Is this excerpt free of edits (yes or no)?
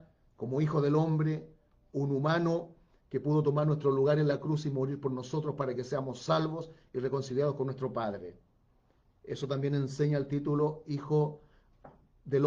yes